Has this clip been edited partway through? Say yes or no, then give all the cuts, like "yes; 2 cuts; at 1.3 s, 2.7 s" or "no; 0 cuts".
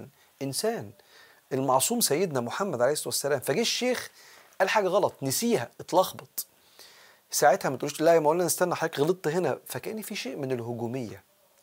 no; 0 cuts